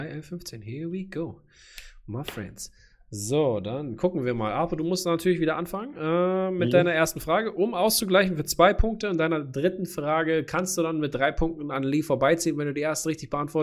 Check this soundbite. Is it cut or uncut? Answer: uncut